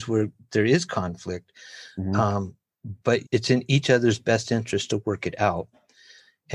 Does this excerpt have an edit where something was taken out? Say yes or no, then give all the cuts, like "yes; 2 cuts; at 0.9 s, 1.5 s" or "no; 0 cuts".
yes; 1 cut; at 3.2 s